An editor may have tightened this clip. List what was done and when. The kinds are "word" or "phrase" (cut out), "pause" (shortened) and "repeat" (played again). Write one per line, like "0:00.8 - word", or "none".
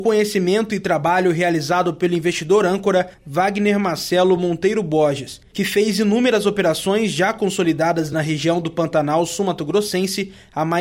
none